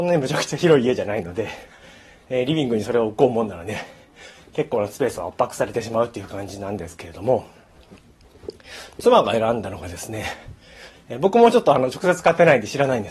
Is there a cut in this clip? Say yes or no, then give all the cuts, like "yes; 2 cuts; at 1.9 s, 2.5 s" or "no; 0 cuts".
no; 0 cuts